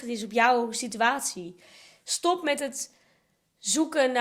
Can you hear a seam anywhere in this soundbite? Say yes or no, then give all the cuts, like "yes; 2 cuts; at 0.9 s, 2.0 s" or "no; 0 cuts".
no; 0 cuts